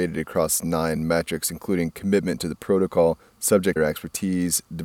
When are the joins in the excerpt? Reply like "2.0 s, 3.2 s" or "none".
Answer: 3.8 s